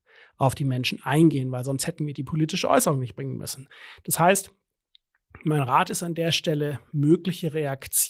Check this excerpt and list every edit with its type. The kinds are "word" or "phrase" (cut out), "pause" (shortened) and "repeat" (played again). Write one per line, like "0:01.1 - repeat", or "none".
none